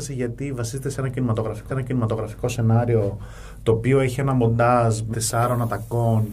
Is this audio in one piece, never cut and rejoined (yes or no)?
no